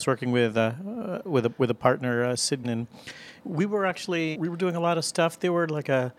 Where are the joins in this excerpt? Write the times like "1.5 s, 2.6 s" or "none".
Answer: 2.6 s, 3.4 s, 4.3 s